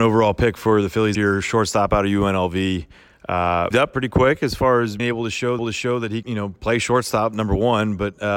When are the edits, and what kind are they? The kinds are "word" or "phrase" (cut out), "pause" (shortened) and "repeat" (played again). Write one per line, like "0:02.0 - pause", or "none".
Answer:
0:01.1 - word
0:03.7 - word
0:05.0 - word
0:05.6 - repeat
0:06.2 - word